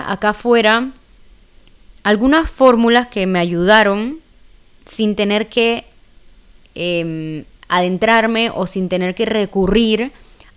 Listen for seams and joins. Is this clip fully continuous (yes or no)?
yes